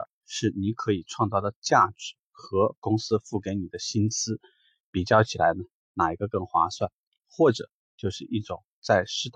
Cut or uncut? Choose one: uncut